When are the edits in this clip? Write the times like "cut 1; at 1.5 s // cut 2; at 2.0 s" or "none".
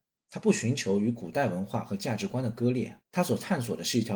cut 1; at 3.0 s